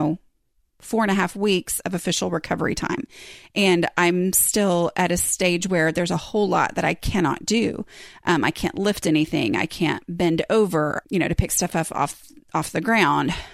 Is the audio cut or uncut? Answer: uncut